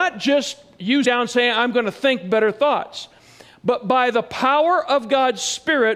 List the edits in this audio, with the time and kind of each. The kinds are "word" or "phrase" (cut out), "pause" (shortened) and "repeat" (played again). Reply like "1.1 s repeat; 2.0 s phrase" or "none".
1.0 s word